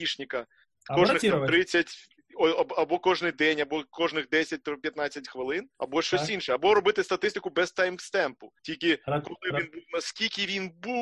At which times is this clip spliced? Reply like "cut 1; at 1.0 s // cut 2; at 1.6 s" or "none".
cut 1; at 5.7 s // cut 2; at 8.6 s

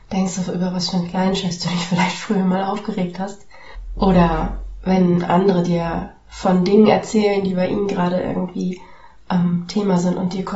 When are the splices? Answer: none

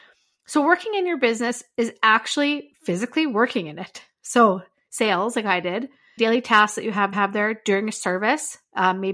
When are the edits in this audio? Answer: cut 1; at 6.2 s // cut 2; at 7.1 s

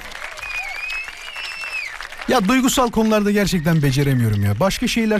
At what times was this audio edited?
none

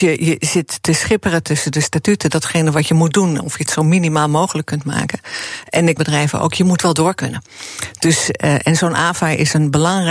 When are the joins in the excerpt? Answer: cut 1; at 1.4 s // cut 2; at 6.0 s

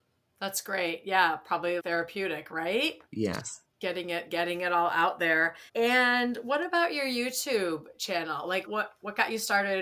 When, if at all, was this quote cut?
cut 1; at 1.8 s // cut 2; at 3.1 s // cut 3; at 5.7 s // cut 4; at 8.7 s

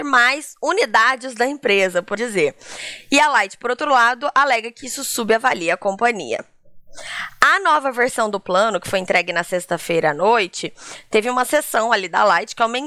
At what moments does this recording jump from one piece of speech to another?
cut 1; at 2.2 s

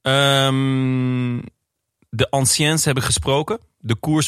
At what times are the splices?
none

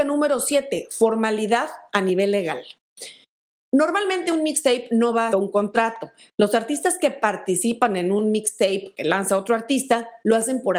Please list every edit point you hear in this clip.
cut 1; at 5.3 s

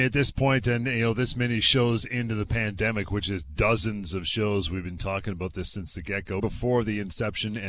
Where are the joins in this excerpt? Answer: cut 1; at 6.4 s

